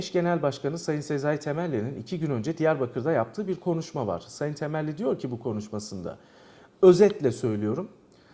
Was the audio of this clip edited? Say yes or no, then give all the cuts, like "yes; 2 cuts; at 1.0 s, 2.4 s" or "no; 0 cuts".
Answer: no; 0 cuts